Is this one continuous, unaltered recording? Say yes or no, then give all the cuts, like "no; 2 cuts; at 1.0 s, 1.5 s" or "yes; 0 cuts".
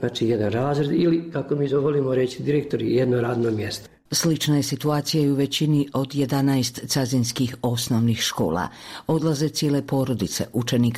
yes; 0 cuts